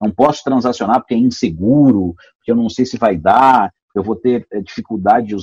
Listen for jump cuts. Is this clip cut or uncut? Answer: uncut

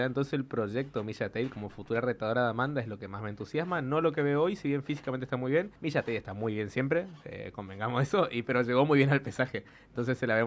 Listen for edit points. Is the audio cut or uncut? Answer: cut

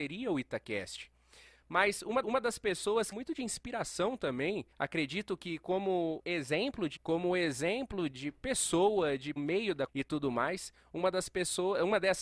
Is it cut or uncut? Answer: cut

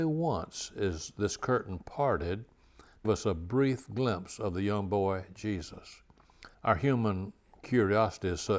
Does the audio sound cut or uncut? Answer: cut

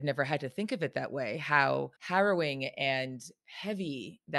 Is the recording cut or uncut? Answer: cut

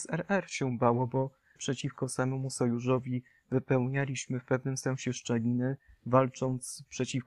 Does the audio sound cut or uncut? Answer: cut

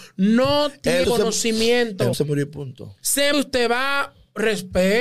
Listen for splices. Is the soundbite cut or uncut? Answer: cut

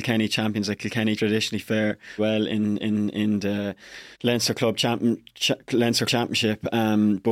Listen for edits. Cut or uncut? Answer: cut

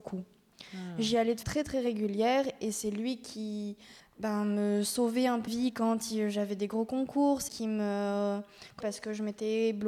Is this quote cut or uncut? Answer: cut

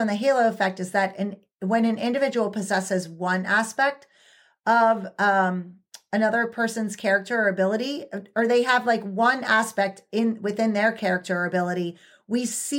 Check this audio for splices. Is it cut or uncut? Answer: uncut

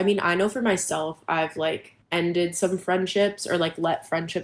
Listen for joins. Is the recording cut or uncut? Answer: cut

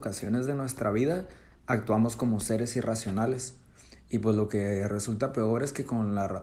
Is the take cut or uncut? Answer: uncut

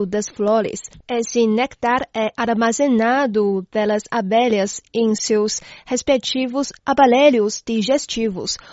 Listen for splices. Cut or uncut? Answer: uncut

